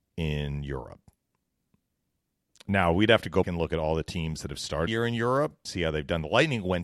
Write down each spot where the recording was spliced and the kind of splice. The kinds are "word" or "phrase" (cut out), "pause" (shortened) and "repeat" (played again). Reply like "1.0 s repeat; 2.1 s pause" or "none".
3.4 s word; 4.9 s word; 5.7 s word